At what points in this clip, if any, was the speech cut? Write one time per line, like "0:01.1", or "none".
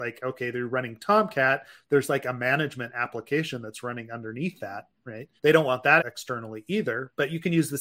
0:05.4
0:06.0